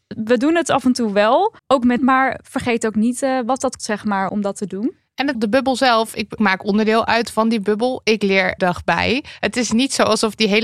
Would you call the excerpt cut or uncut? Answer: cut